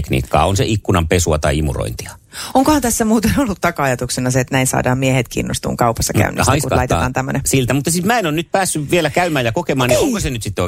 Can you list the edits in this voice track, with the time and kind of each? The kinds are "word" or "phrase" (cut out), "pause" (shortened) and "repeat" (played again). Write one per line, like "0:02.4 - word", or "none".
none